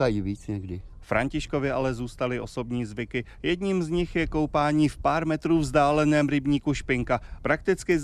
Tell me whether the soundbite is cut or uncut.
uncut